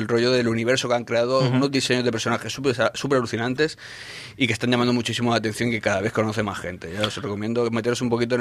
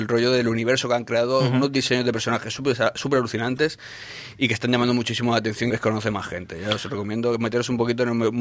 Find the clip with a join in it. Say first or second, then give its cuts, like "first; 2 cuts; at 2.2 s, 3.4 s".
second; 1 cut; at 5.7 s